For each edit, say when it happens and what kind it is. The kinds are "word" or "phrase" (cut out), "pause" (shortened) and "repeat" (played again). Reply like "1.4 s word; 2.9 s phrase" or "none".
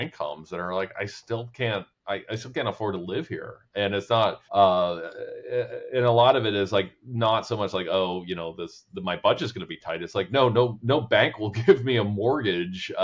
4.5 s pause